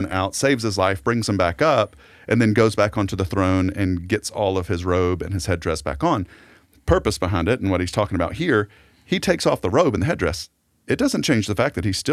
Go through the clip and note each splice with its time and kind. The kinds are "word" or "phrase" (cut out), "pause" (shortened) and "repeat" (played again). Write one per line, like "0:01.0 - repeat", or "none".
none